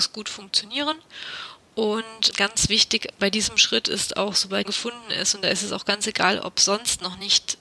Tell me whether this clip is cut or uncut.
cut